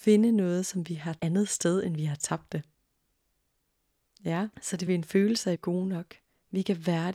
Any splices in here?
yes; 4 cuts; at 1.2 s, 4.5 s, 4.9 s, 5.6 s

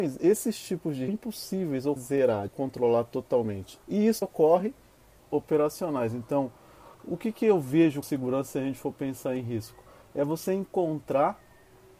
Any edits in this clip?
yes; 8 cuts; at 1.1 s, 2.0 s, 2.5 s, 3.8 s, 4.2 s, 5.2 s, 6.9 s, 8.0 s

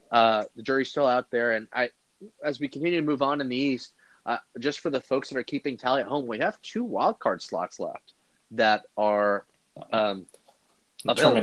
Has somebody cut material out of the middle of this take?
no; 0 cuts

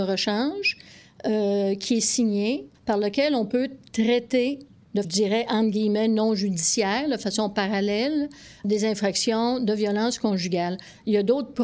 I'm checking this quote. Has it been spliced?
yes; 3 cuts; at 2.7 s, 5.0 s, 8.6 s

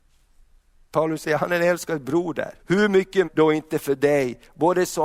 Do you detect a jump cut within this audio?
yes; 2 cuts; at 2.6 s, 3.2 s

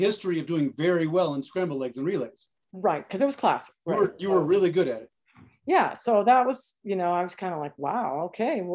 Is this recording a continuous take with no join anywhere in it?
yes; 0 cuts

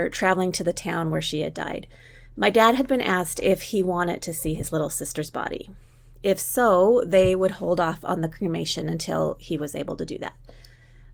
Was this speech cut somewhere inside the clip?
no; 0 cuts

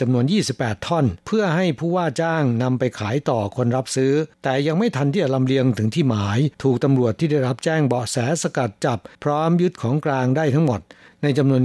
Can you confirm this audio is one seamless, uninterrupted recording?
no; 4 cuts; at 1.2 s, 4.3 s, 6.5 s, 9.1 s

